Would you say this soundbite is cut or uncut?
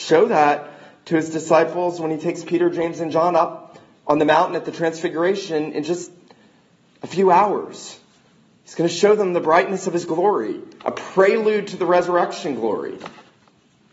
uncut